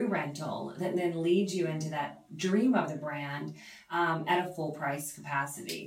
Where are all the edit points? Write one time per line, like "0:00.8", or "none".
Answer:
none